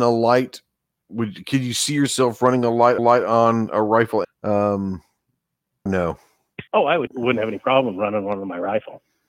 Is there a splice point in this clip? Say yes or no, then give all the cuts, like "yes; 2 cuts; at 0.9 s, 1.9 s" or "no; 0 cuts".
yes; 5 cuts; at 3.0 s, 4.2 s, 5.9 s, 6.7 s, 7.1 s